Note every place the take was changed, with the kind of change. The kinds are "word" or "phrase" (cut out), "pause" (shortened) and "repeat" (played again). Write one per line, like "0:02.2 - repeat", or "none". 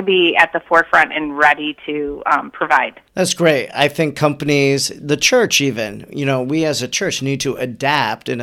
0:03.1 - pause